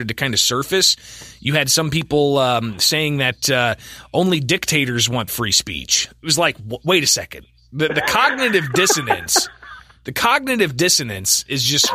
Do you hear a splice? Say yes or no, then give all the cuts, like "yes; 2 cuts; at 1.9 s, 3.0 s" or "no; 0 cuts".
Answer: no; 0 cuts